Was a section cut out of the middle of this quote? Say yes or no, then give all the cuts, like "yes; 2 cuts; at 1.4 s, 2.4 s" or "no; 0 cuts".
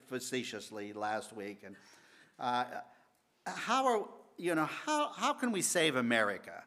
no; 0 cuts